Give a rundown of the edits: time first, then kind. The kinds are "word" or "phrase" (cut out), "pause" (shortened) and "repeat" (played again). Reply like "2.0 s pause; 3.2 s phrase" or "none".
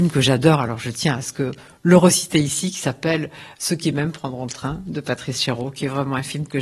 none